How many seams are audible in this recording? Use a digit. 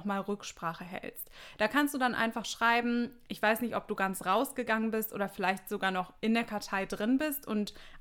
0